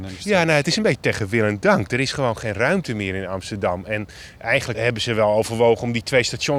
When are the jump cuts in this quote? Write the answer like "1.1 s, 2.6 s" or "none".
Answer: 4.7 s